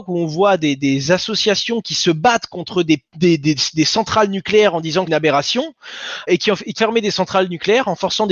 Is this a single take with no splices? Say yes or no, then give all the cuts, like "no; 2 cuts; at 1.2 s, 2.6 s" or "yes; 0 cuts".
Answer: no; 4 cuts; at 3.1 s, 5.1 s, 6.3 s, 6.8 s